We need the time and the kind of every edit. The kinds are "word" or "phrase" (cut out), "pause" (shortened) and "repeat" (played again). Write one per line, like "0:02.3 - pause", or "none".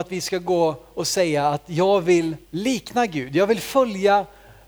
0:02.4 - pause